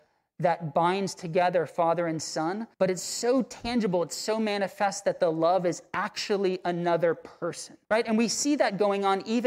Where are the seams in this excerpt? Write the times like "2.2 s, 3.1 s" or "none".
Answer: 2.7 s, 7.8 s